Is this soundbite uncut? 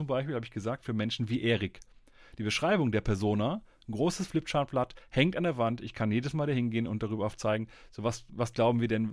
yes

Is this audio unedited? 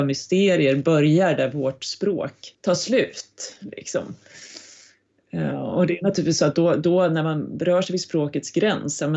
no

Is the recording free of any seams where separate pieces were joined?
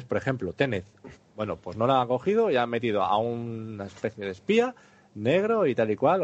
yes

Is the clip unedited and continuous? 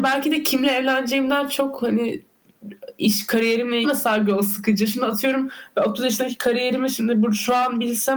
no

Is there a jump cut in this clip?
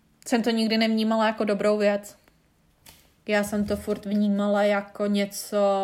no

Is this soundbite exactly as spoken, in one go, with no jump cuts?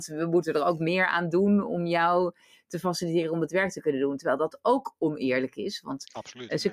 yes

